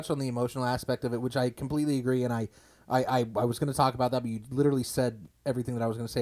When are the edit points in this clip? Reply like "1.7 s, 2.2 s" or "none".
none